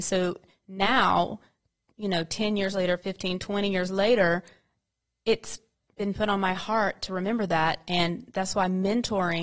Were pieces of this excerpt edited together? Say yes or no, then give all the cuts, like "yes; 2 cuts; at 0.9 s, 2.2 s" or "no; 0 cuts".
no; 0 cuts